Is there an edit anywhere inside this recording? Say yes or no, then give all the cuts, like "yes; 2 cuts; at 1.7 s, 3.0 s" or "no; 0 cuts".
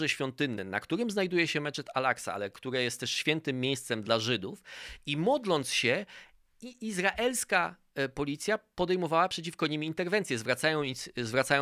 no; 0 cuts